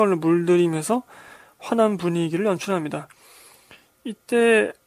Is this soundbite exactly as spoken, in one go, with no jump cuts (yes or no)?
yes